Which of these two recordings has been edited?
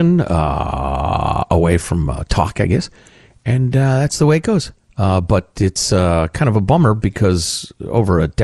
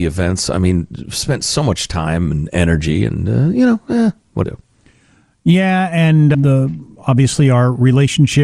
second; 2 cuts; at 4.4 s, 6.3 s

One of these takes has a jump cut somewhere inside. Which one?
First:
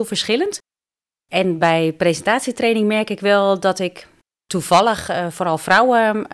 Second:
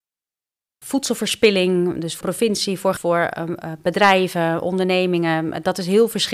second; 2 cuts; at 2.2 s, 3.0 s

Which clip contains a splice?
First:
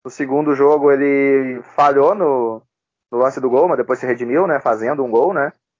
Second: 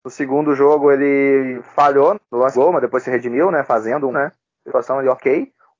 second; 4 cuts; at 2.1 s, 2.5 s, 4.1 s, 4.7 s

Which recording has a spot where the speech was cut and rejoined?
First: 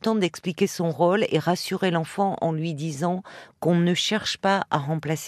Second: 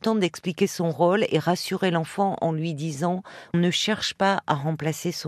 second; 1 cut; at 3.5 s

